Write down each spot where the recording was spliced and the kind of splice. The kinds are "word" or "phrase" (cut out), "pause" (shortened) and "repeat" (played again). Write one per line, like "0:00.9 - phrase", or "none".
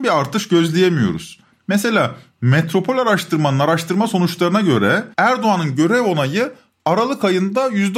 0:05.1 - pause